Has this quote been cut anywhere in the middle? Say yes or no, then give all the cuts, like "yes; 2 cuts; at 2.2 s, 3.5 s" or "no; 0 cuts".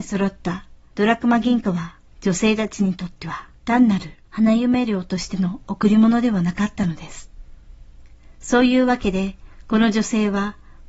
yes; 2 cuts; at 2.1 s, 3.6 s